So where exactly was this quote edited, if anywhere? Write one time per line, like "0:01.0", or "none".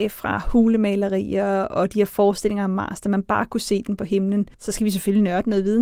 0:04.5